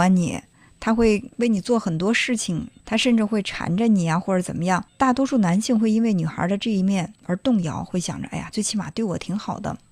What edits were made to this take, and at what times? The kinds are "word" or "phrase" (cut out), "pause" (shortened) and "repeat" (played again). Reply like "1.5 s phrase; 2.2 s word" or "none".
1.3 s pause; 2.8 s phrase; 4.9 s pause; 7.2 s pause; 8.5 s phrase